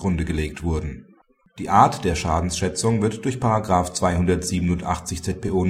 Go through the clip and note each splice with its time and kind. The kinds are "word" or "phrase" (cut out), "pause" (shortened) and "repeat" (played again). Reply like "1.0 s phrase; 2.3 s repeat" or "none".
none